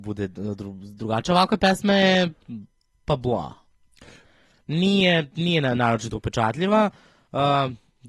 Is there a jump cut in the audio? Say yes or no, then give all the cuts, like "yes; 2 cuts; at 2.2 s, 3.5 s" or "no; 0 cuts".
no; 0 cuts